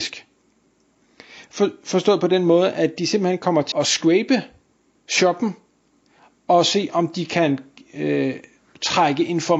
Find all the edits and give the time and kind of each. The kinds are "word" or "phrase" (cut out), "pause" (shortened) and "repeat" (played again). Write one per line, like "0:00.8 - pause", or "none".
0:03.7 - word